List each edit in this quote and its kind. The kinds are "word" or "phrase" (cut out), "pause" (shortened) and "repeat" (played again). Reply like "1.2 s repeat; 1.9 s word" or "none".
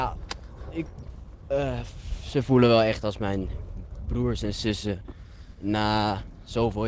none